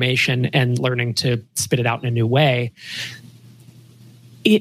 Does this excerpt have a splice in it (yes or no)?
no